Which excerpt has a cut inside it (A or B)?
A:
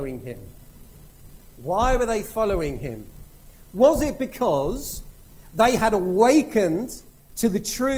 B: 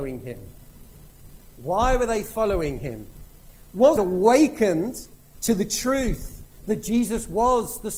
B